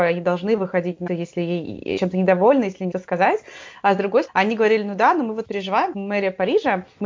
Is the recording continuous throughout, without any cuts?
no; 6 cuts; at 1.1 s, 2.0 s, 2.9 s, 4.3 s, 5.4 s, 5.9 s

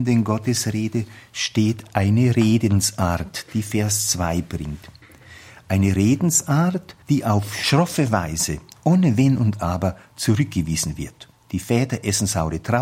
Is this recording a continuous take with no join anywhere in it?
no; 1 cut; at 7.0 s

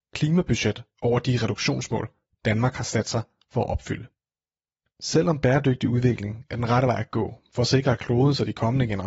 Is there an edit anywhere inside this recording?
no; 0 cuts

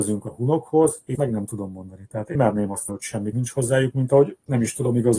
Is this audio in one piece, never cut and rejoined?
no; 4 cuts; at 1.1 s, 2.3 s, 2.9 s, 3.3 s

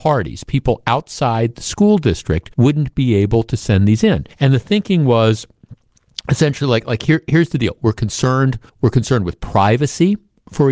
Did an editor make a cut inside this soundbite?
yes; 3 cuts; at 2.5 s, 4.3 s, 8.7 s

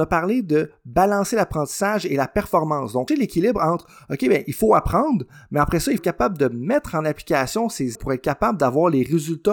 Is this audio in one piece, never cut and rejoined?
no; 3 cuts; at 3.1 s, 6.0 s, 7.9 s

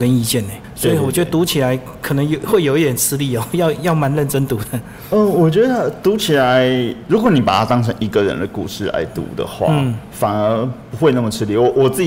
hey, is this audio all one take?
yes; 0 cuts

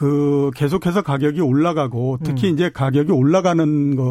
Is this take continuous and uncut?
yes; 0 cuts

